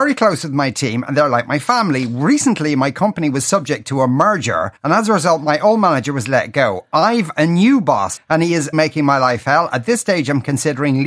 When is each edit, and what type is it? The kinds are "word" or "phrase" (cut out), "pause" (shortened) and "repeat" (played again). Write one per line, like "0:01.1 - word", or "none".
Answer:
0:04.8 - pause
0:08.2 - word
0:08.7 - word